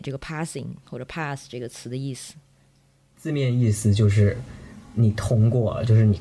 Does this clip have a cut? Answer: no; 0 cuts

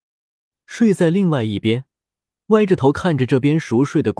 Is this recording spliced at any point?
no; 0 cuts

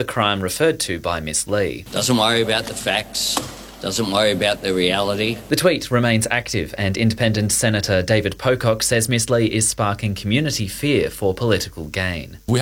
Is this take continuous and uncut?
yes; 0 cuts

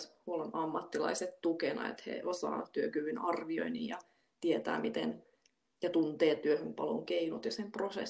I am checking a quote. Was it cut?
no; 0 cuts

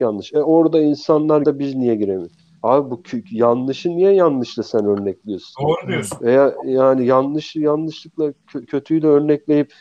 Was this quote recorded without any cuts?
no; 3 cuts; at 1.4 s, 2.6 s, 8.7 s

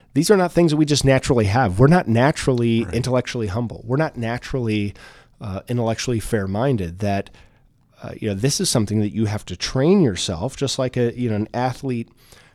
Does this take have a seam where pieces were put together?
no; 0 cuts

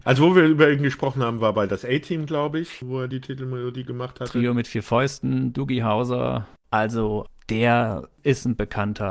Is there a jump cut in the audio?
no; 0 cuts

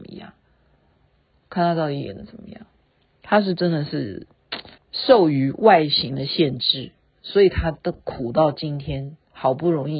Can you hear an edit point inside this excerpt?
yes; 1 cut; at 4.8 s

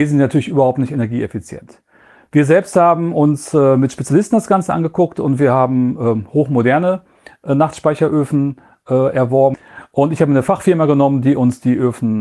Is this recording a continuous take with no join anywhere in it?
yes; 0 cuts

